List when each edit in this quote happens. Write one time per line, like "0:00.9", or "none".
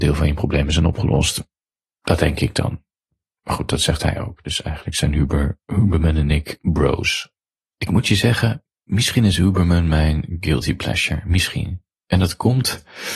0:08.7